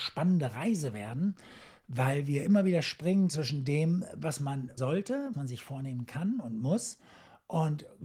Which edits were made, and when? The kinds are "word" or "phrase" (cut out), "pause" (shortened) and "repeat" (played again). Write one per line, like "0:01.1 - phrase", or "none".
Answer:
0:04.8 - word
0:05.3 - word